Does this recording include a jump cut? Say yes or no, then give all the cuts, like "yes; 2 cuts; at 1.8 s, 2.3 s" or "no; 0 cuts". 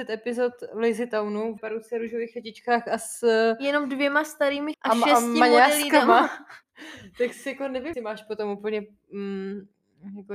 yes; 4 cuts; at 1.6 s, 4.7 s, 6.6 s, 7.9 s